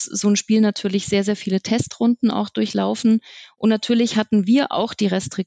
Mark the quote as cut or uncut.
uncut